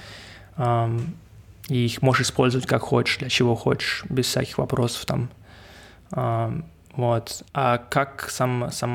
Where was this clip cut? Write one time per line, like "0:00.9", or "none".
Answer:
0:07.5